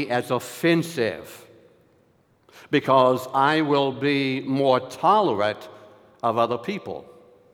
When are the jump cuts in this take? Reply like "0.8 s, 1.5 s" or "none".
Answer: none